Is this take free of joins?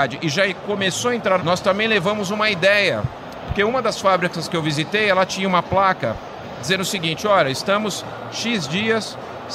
no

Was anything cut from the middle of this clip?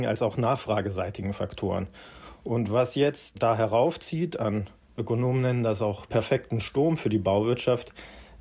yes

